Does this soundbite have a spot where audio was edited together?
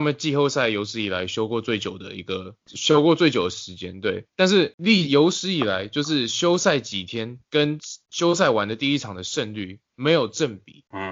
yes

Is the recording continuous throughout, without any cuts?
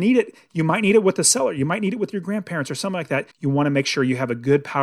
no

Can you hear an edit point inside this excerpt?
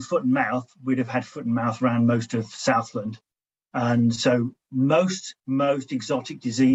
yes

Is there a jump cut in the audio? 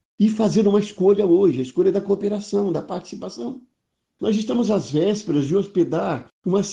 no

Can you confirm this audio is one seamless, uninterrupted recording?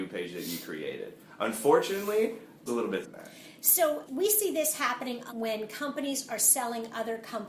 no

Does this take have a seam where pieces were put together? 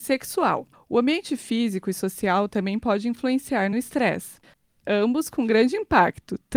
no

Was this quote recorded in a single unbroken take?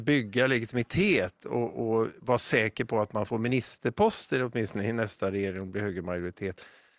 yes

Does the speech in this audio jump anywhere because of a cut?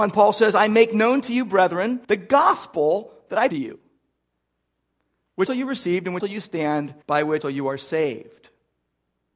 yes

